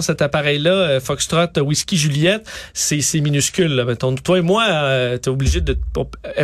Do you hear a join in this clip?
no; 0 cuts

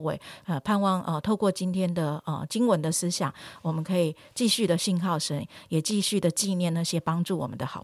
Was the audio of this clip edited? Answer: no; 0 cuts

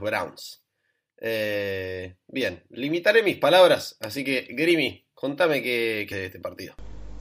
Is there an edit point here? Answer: yes; 1 cut; at 6.1 s

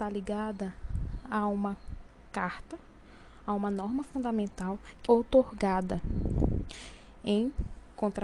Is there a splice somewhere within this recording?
yes; 1 cut; at 5.1 s

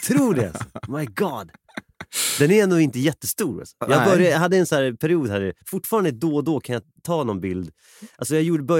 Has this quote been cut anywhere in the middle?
yes; 1 cut; at 5.6 s

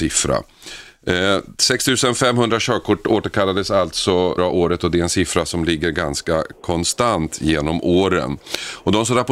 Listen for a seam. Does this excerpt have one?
yes; 1 cut; at 4.4 s

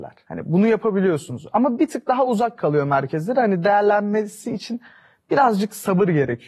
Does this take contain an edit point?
no; 0 cuts

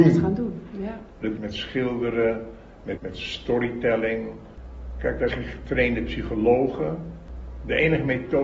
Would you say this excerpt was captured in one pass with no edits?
no; 3 cuts; at 1.4 s, 3.0 s, 5.3 s

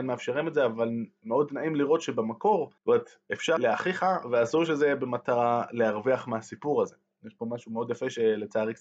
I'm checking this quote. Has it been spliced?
yes; 2 cuts; at 2.8 s, 3.6 s

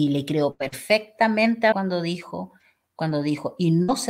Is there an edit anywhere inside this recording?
yes; 1 cut; at 1.7 s

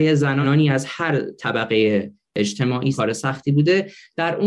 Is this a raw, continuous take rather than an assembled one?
yes; 0 cuts

